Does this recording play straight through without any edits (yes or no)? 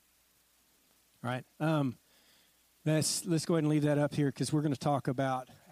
yes